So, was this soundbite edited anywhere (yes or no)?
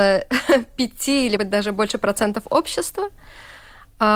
yes